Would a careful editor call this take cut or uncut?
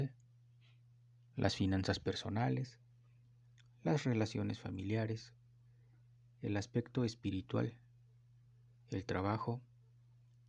uncut